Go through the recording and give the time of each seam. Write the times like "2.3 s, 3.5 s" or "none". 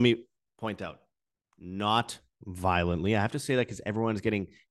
none